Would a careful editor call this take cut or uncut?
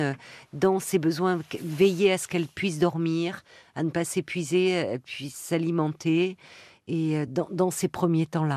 uncut